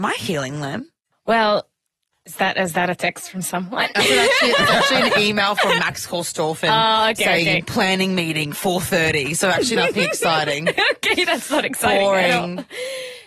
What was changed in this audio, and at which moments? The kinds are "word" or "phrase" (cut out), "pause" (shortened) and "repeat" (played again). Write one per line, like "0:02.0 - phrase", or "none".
0:01.1 - pause